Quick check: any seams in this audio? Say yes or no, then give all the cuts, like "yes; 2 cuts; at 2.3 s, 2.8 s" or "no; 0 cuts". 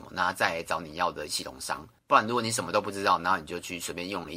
yes; 2 cuts; at 1.3 s, 2.0 s